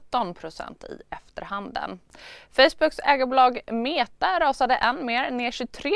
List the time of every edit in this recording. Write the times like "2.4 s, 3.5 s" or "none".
none